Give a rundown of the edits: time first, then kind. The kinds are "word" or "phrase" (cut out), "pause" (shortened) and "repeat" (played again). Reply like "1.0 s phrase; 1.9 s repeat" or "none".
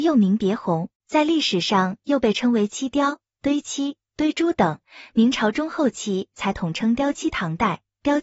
1.0 s pause

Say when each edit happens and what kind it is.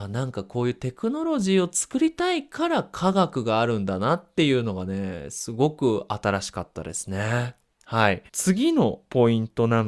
8.3 s pause

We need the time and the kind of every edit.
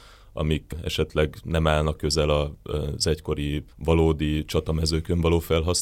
1.9 s word; 3.7 s pause

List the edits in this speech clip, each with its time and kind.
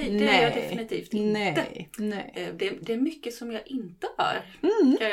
none

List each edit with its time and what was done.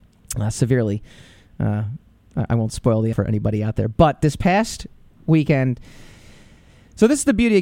3.1 s word

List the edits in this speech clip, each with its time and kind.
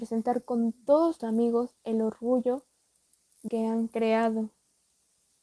1.2 s word; 3.5 s word

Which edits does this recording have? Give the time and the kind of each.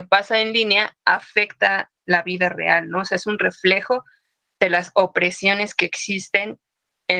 none

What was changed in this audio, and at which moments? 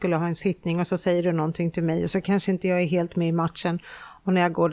none

